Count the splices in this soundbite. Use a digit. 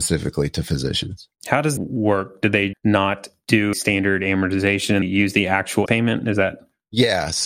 6